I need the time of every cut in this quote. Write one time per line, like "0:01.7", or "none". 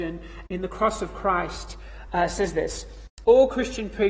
none